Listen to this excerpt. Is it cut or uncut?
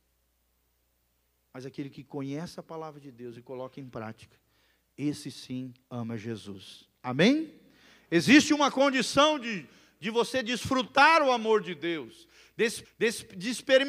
cut